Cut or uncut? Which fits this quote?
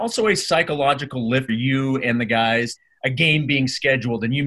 cut